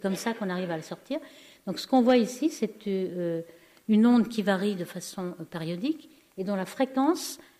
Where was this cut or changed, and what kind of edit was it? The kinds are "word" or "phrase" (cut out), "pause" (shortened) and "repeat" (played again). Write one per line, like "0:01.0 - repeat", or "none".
none

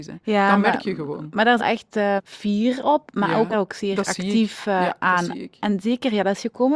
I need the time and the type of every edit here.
0:01.6 - phrase
0:02.2 - word
0:03.5 - phrase

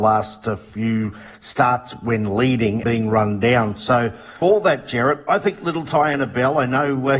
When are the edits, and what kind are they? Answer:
0:02.8 - word
0:04.4 - word

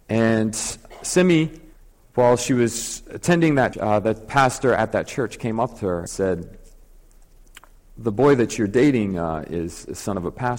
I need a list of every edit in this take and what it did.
0:01.7 - pause
0:03.7 - word
0:06.1 - word

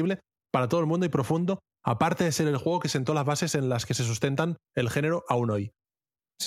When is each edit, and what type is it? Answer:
0:04.6 - pause

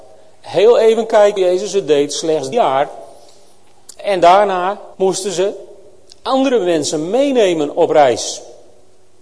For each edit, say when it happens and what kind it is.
0:01.4 - word
0:02.5 - word
0:04.9 - pause

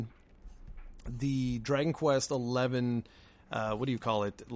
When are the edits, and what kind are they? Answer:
none

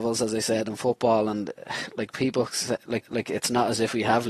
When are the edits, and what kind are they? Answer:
0:03.0 - repeat

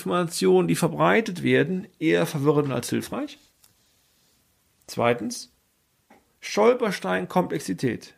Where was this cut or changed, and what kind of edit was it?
none

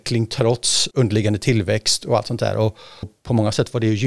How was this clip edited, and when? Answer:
0:00.9 - word
0:03.0 - word

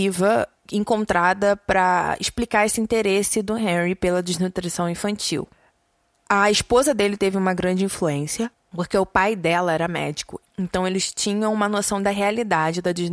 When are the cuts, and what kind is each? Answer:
none

